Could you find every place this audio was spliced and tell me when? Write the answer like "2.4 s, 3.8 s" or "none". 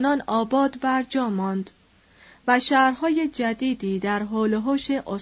none

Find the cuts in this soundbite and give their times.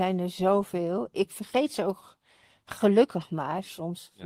none

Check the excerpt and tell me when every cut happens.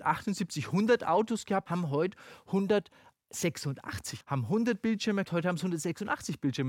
1.7 s, 4.2 s, 5.2 s

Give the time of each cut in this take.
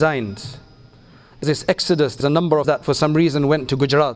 1.4 s, 2.2 s, 2.6 s

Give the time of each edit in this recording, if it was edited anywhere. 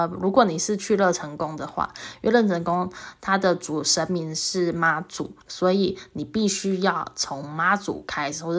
5.4 s

